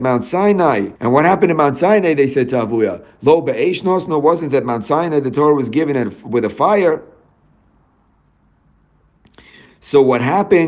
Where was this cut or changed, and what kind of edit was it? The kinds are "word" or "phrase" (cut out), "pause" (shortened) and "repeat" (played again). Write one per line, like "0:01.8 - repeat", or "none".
0:01.0 - pause